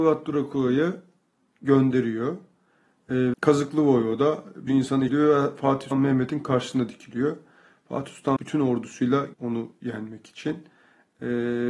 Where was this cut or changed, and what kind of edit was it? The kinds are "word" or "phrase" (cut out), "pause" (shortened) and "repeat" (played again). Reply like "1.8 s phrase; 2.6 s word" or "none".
3.3 s word; 4.7 s word; 5.1 s word; 5.9 s word; 8.4 s word; 9.3 s word